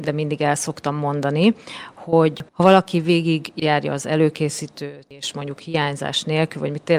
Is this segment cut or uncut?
cut